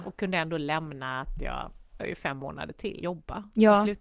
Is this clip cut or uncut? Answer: cut